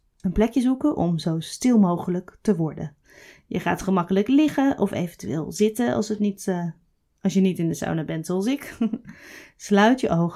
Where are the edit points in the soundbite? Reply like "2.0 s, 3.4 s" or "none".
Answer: none